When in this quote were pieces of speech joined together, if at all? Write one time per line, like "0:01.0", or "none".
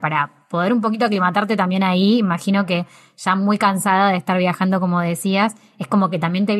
none